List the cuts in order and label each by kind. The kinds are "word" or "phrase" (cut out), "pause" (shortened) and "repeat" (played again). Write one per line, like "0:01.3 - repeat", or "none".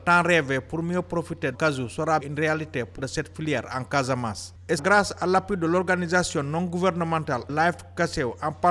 0:01.5 - phrase
0:02.2 - word
0:03.0 - phrase
0:04.8 - word